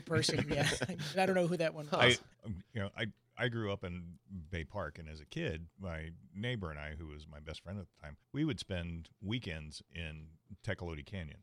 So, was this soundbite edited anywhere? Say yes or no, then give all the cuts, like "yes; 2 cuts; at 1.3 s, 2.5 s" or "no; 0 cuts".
yes; 4 cuts; at 2.3 s, 5.7 s, 8.2 s, 9.1 s